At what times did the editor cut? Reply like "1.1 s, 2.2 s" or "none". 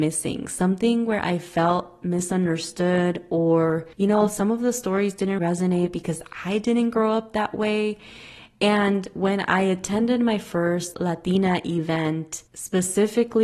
3.9 s, 5.4 s, 10.9 s, 12.5 s